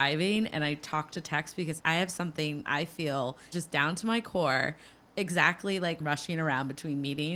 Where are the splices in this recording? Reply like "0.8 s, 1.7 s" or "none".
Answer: 1.8 s, 2.7 s, 3.5 s, 6.0 s

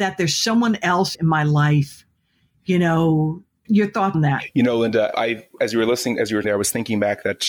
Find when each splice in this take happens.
1.1 s, 3.6 s, 4.1 s, 5.1 s, 6.4 s

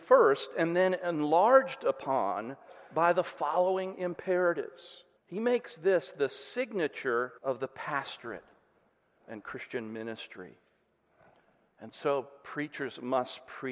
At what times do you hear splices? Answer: 5.2 s, 7.4 s

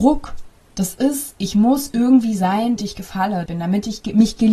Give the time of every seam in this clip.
2.8 s, 3.5 s

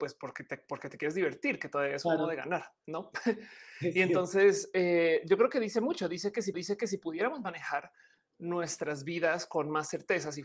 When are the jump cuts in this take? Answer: 6.5 s

